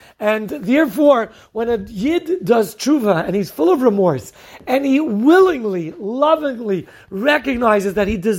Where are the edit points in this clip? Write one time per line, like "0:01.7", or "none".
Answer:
none

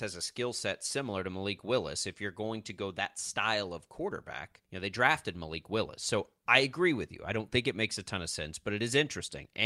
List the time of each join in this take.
0:04.6

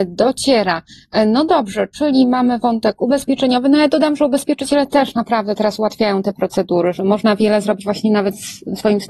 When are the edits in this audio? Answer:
none

